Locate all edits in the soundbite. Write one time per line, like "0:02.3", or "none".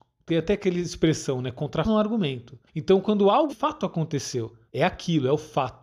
0:01.8
0:02.7
0:03.5
0:04.7